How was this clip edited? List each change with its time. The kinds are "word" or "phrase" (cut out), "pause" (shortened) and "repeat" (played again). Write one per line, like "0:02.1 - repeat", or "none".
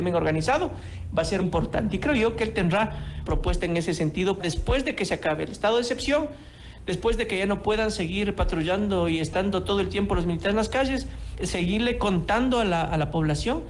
0:01.4 - word
0:03.3 - phrase
0:04.4 - word
0:11.4 - word